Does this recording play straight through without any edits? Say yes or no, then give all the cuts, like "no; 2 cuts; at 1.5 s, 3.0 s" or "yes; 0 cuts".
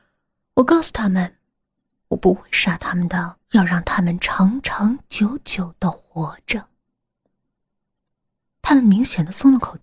no; 1 cut; at 3.4 s